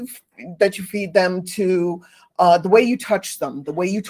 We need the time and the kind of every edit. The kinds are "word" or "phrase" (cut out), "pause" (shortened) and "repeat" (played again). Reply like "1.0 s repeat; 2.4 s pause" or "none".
none